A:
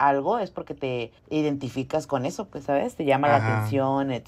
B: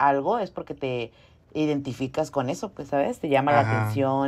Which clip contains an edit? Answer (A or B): A